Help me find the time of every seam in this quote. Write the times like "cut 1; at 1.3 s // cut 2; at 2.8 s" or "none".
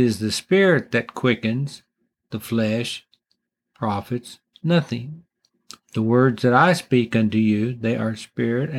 none